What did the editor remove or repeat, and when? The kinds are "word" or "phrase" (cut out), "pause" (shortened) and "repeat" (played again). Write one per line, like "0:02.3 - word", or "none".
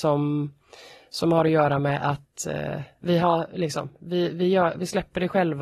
0:02.9 - pause